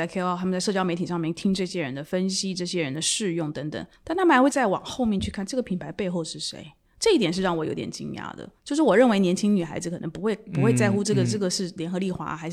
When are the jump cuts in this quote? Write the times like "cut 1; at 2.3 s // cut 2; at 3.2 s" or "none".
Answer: cut 1; at 4.0 s // cut 2; at 8.6 s